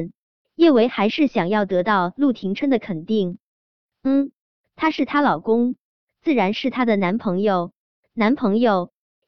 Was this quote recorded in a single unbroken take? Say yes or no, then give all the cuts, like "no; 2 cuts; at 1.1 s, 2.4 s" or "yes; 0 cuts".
yes; 0 cuts